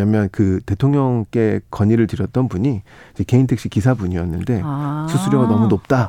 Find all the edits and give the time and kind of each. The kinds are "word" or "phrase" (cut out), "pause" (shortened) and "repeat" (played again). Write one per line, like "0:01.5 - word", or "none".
none